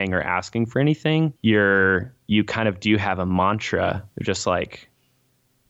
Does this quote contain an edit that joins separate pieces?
yes; 2 cuts; at 1.4 s, 4.1 s

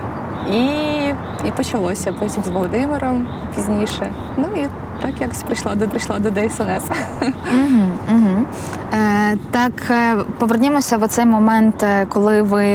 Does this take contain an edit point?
yes; 2 cuts; at 2.4 s, 5.9 s

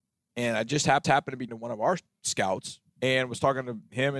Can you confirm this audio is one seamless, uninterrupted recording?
no; 3 cuts; at 1.0 s, 1.5 s, 2.9 s

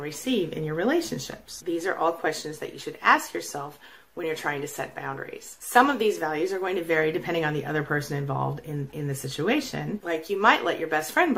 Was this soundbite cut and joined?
no; 0 cuts

